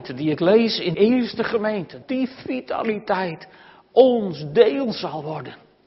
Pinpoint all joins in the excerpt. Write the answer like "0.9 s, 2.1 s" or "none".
0.9 s, 2.0 s